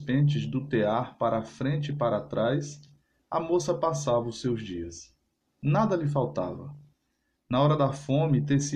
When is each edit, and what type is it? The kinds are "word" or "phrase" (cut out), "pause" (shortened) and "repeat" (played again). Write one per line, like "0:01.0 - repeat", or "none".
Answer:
none

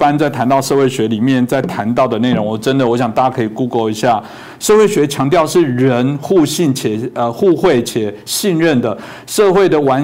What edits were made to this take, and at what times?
none

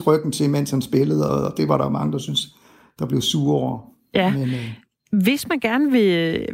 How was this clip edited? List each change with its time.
0:01.3 - phrase

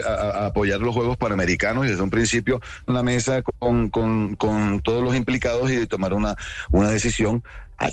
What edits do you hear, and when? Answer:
0:02.9 - phrase

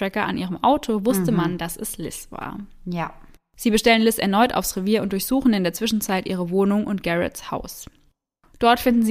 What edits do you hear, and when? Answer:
none

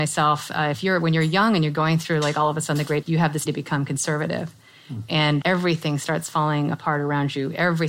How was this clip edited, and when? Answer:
0:03.0 - word
0:03.5 - word
0:05.4 - word

